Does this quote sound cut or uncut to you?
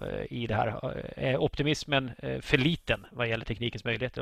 uncut